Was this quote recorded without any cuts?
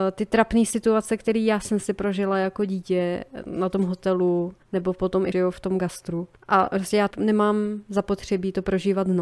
no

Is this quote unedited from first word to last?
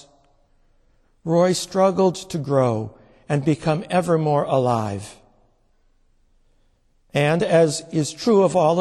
yes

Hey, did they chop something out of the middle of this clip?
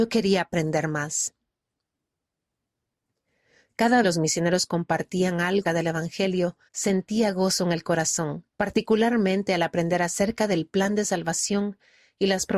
yes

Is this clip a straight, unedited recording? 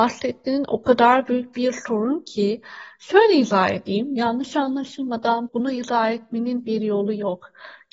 no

